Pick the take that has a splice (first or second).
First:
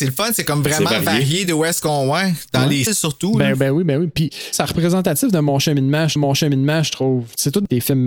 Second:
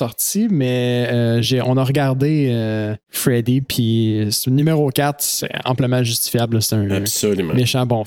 first